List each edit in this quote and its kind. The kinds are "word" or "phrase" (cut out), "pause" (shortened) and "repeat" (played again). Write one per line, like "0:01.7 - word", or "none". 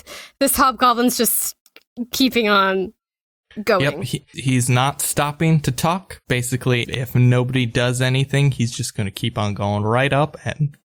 0:04.3 - word
0:06.8 - word